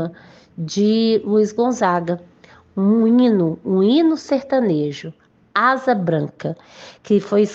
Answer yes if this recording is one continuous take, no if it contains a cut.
yes